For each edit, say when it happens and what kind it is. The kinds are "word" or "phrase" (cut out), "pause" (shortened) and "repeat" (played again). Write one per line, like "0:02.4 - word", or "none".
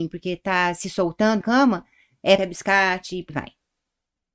0:01.4 - word
0:02.4 - word
0:03.3 - word